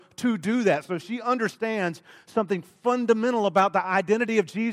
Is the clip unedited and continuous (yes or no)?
yes